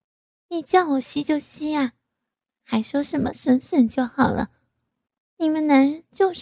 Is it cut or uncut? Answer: uncut